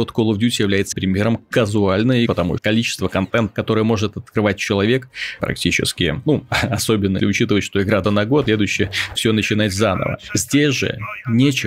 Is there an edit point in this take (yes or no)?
yes